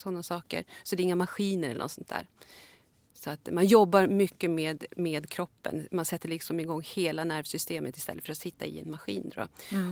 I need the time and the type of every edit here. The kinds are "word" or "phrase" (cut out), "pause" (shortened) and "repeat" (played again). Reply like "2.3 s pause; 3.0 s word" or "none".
none